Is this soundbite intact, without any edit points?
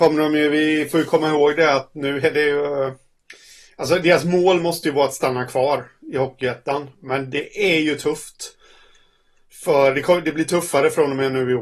yes; 0 cuts

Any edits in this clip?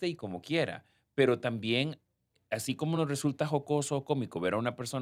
no; 0 cuts

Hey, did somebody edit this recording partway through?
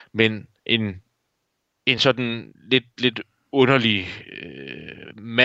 no; 0 cuts

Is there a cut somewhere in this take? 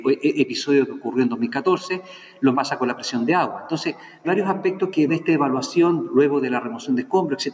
yes; 3 cuts; at 2.5 s, 4.2 s, 5.1 s

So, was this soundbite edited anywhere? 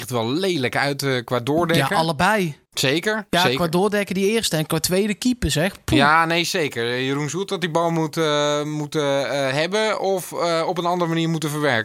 yes; 1 cut; at 2.7 s

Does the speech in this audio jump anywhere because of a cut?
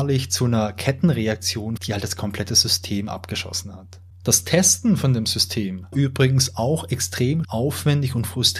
yes; 3 cuts; at 1.8 s, 5.9 s, 7.4 s

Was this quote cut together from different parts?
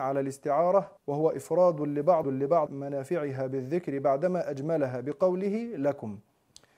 yes; 3 cuts; at 1.0 s, 2.2 s, 2.7 s

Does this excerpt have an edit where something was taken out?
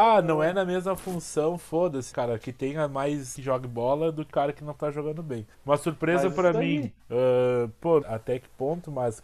yes; 6 cuts; at 2.1 s, 3.3 s, 4.3 s, 5.5 s, 7.0 s, 8.0 s

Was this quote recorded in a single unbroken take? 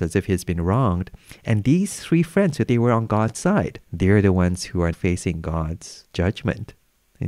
no; 4 cuts; at 2.7 s, 3.8 s, 4.9 s, 6.1 s

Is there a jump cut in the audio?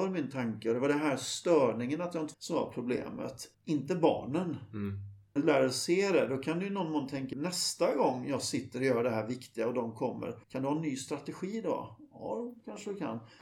yes; 5 cuts; at 2.3 s, 3.5 s, 5.4 s, 7.3 s, 10.4 s

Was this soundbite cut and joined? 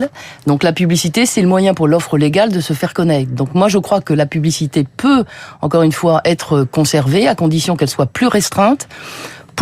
no; 0 cuts

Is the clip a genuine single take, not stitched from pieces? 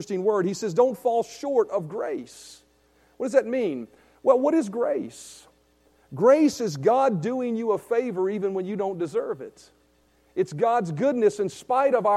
yes; 0 cuts

